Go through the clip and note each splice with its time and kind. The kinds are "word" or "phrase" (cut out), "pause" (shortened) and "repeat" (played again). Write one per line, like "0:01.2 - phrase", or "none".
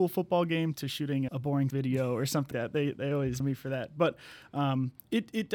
0:01.3 - word
0:01.7 - word
0:02.5 - word
0:03.4 - phrase